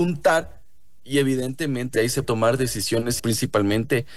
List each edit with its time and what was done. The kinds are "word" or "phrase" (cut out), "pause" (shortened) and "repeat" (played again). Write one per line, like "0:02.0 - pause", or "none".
0:01.9 - word
0:02.2 - word
0:03.2 - word